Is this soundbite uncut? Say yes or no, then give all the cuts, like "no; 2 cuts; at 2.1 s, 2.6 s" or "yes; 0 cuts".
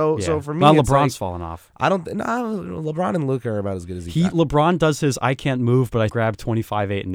no; 1 cut; at 6.1 s